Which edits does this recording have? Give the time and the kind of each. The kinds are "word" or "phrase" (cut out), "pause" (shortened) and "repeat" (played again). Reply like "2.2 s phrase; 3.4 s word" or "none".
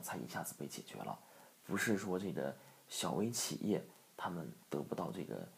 4.6 s pause